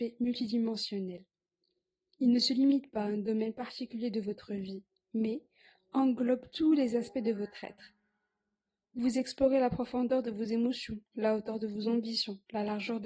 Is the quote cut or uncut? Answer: uncut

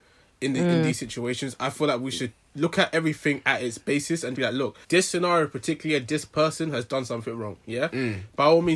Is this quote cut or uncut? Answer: cut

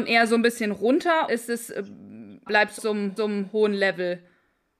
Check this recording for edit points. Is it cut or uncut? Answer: cut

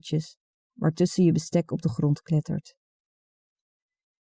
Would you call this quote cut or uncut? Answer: uncut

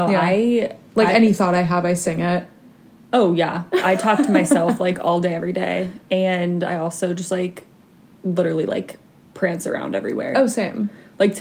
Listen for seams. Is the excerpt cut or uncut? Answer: uncut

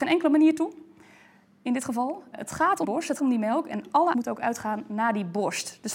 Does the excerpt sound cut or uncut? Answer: cut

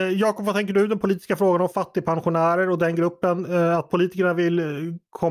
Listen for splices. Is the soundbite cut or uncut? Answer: uncut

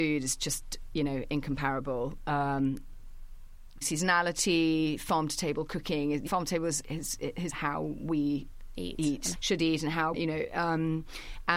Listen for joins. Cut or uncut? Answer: cut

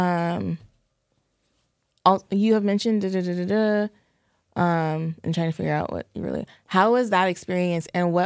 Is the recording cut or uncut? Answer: uncut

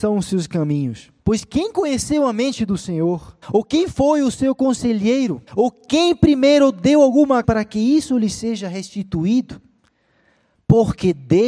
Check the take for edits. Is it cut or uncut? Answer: cut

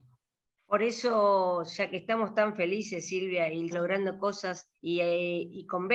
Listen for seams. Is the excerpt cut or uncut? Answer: cut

